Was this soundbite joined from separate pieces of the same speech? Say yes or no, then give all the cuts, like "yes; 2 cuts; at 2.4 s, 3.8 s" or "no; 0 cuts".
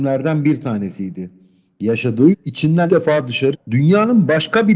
yes; 3 cuts; at 2.3 s, 2.9 s, 3.5 s